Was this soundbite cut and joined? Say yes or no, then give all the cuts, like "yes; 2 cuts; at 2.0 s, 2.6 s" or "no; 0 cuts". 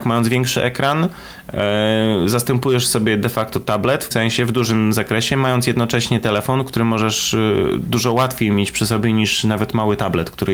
yes; 1 cut; at 4.1 s